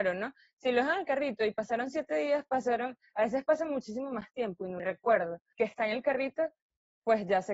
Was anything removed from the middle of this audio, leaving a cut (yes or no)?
no